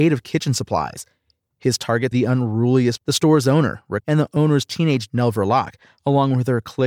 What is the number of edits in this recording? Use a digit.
4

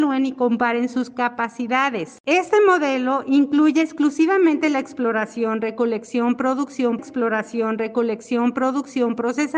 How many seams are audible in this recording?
1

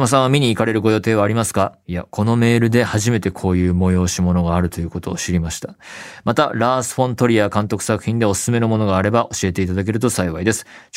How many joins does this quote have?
1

